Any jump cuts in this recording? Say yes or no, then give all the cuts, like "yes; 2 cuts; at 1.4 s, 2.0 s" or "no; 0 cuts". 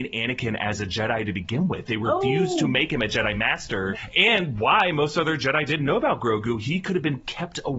no; 0 cuts